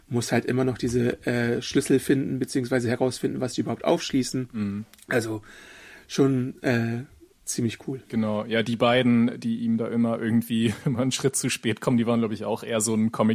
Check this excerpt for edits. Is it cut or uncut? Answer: uncut